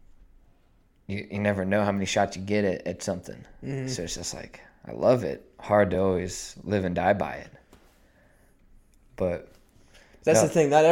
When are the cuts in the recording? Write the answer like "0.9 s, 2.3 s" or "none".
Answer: none